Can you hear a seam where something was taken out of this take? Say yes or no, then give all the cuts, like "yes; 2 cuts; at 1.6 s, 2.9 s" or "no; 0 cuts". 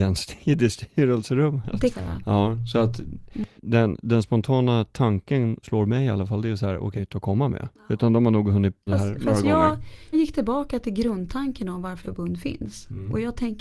yes; 7 cuts; at 1.9 s, 3.6 s, 5.6 s, 7.0 s, 8.9 s, 10.1 s, 12.0 s